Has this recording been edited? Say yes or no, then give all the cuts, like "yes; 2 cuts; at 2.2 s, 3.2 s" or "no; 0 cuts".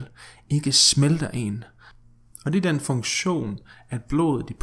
no; 0 cuts